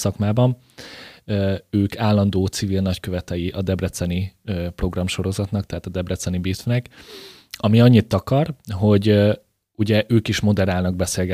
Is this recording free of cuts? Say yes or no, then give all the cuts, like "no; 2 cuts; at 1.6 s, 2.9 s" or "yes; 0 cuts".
yes; 0 cuts